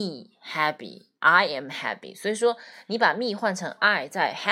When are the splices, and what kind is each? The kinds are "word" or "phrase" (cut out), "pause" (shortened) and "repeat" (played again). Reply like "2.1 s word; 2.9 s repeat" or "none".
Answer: none